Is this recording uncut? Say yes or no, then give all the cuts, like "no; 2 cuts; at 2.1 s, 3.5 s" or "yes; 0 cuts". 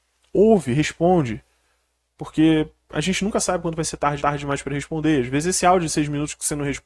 no; 1 cut; at 4.2 s